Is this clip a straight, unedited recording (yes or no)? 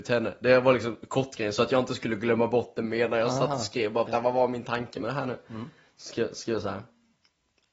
no